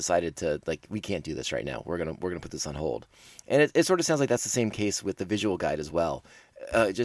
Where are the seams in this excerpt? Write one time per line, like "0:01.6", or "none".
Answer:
none